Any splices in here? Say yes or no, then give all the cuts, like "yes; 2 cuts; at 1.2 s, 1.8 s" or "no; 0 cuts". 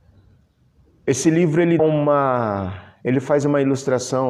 yes; 1 cut; at 1.8 s